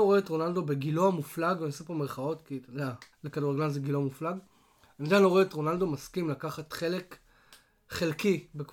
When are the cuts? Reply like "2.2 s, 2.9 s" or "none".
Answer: 3.1 s